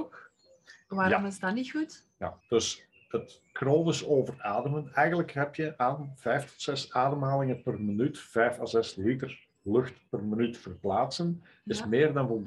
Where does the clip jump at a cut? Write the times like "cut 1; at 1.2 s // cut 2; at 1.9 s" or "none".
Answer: cut 1; at 2.4 s